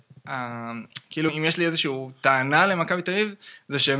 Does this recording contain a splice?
yes; 1 cut; at 1.3 s

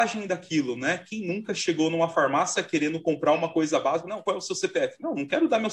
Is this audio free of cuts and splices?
yes; 0 cuts

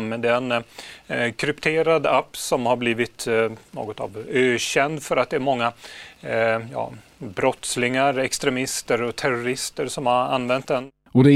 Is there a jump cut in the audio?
no; 0 cuts

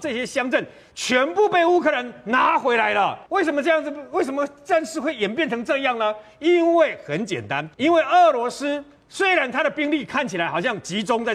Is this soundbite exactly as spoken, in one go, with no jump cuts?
no; 2 cuts; at 3.3 s, 7.7 s

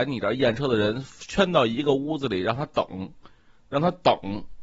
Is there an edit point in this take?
no; 0 cuts

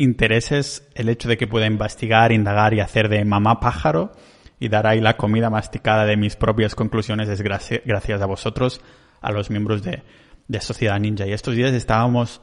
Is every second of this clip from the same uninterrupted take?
yes; 0 cuts

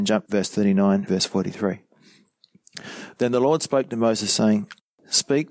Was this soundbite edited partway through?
yes; 1 cut; at 1.1 s

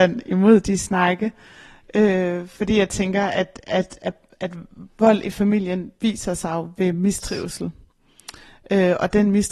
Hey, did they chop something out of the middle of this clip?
no; 0 cuts

